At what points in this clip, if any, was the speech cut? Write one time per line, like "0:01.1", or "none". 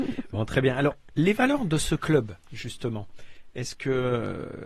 0:02.4